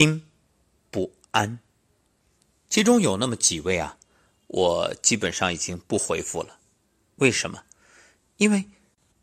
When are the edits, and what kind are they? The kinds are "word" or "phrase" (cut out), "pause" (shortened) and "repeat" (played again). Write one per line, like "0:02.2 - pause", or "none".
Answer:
none

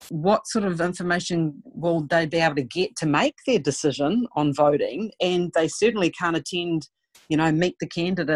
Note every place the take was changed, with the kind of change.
none

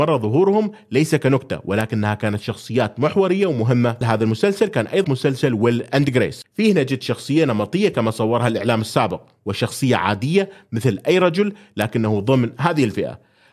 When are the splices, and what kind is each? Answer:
0:04.0 - phrase
0:05.0 - word

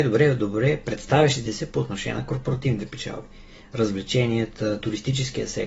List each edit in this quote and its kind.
none

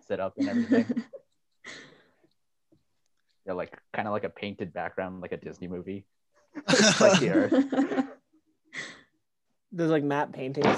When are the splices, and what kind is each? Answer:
none

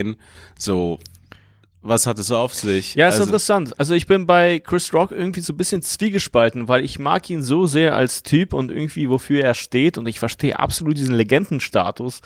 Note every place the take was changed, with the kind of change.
none

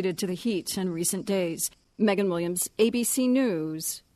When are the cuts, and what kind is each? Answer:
none

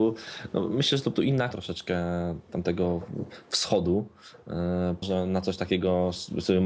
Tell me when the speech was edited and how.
0:01.2 - word
0:01.5 - word
0:05.0 - word

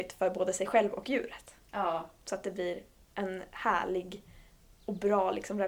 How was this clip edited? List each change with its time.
none

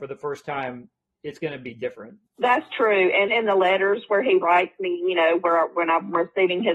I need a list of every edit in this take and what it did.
0:02.3 - pause
0:03.3 - word

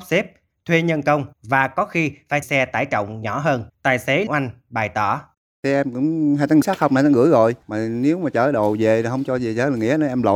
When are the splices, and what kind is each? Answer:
0:01.3 - pause
0:02.4 - word
0:03.7 - pause
0:04.3 - word
0:05.3 - pause
0:06.6 - word
0:07.6 - pause

